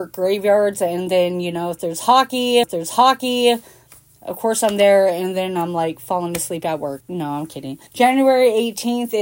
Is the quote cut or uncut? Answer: cut